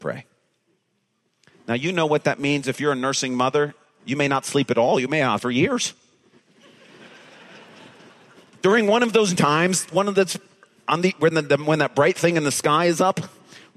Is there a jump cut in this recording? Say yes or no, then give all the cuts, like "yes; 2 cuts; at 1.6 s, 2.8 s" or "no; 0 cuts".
yes; 2 cuts; at 5.4 s, 9.4 s